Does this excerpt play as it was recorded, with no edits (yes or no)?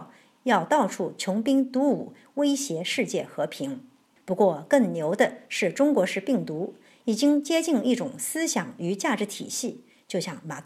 yes